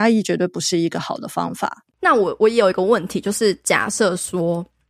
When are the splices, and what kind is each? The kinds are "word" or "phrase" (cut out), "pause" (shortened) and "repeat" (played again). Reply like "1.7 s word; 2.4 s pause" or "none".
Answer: 1.9 s pause